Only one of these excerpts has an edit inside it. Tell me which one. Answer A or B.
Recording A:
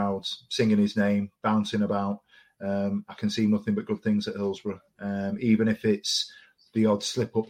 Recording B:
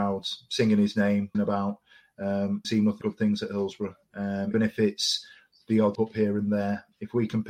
B